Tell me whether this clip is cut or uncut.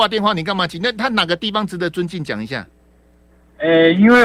uncut